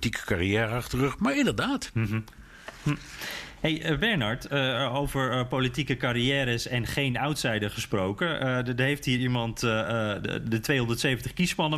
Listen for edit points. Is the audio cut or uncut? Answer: uncut